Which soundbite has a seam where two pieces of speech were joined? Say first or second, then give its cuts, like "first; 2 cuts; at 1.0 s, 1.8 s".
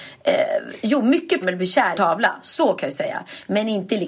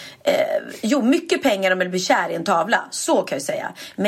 first; 2 cuts; at 1.4 s, 1.9 s